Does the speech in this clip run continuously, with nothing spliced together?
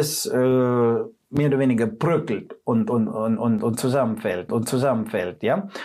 no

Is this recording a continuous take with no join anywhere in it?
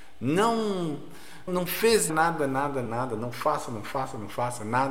no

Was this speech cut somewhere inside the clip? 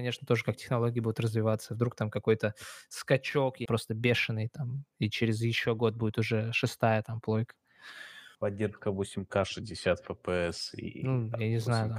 yes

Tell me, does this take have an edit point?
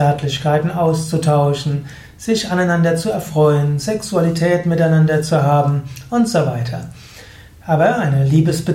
no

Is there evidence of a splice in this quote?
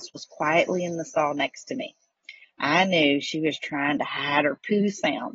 no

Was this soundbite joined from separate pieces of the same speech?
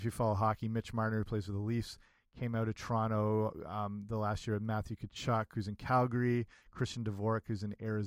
no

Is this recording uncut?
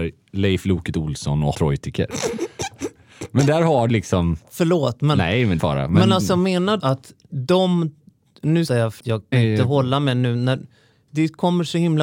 no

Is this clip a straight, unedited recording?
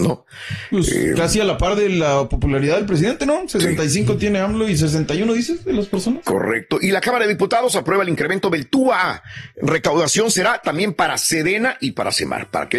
yes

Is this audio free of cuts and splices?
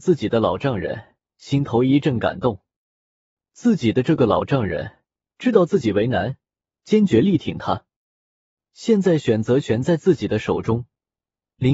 yes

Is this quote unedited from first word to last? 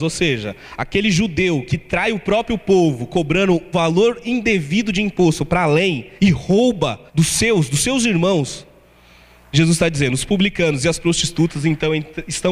no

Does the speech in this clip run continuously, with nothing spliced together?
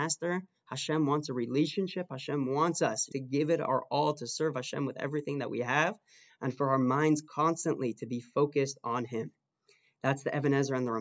yes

